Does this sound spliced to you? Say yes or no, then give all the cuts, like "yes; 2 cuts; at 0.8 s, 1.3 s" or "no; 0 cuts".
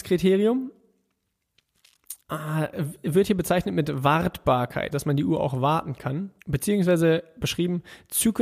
yes; 3 cuts; at 2.2 s, 4.9 s, 6.4 s